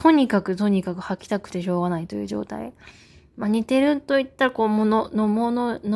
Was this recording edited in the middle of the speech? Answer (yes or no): no